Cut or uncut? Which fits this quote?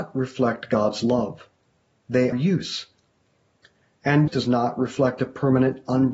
cut